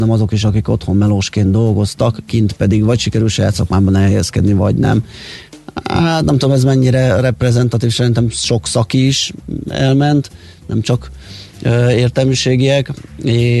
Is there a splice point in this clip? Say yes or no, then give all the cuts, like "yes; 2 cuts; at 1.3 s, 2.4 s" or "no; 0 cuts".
no; 0 cuts